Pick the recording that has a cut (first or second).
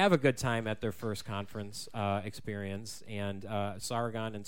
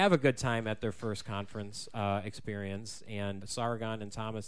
second